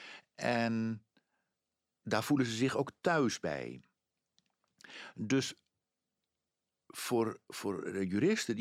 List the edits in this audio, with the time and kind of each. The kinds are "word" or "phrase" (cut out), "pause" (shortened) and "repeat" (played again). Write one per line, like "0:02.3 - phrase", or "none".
none